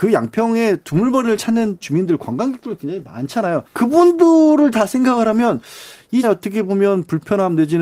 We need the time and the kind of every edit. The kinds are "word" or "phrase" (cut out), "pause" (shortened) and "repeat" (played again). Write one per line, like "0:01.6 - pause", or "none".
0:01.8 - phrase
0:03.7 - pause
0:06.2 - word